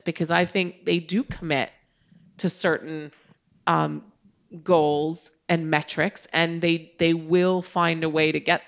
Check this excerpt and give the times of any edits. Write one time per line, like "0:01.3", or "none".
none